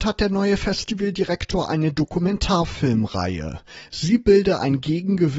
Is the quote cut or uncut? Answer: uncut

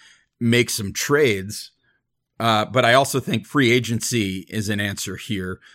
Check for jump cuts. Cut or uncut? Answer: uncut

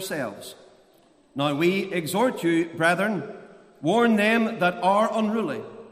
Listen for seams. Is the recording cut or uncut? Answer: uncut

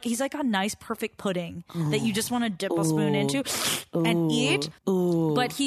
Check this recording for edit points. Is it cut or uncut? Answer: cut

